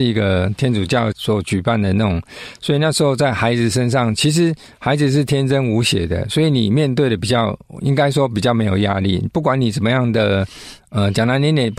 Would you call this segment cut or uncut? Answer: uncut